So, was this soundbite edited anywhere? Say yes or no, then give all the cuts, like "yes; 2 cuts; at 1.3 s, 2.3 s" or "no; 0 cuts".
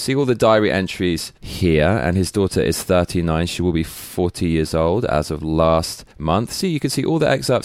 yes; 2 cuts; at 1.4 s, 6.1 s